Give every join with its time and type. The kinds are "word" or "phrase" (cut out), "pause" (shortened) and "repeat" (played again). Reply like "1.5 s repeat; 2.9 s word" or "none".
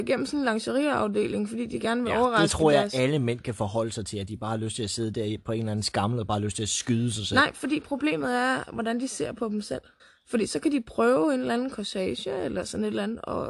10.0 s pause